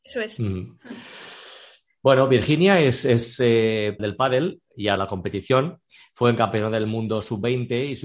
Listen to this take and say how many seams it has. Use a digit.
2